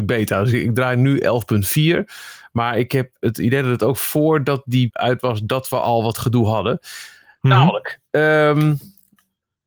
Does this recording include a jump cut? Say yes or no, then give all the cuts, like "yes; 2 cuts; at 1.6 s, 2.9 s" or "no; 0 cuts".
yes; 1 cut; at 4.9 s